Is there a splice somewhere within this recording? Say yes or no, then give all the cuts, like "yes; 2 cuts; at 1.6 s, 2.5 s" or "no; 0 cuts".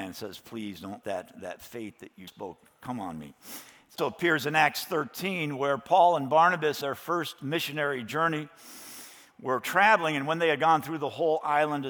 yes; 4 cuts; at 1.0 s, 2.3 s, 4.0 s, 6.8 s